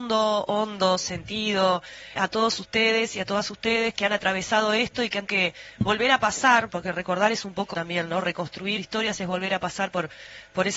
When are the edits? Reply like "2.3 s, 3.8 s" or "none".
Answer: 2.2 s, 3.9 s, 5.3 s, 7.7 s, 8.8 s